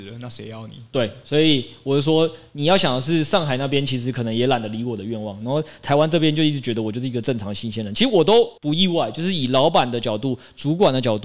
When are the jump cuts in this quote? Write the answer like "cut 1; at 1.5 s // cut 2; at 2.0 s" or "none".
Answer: cut 1; at 8.6 s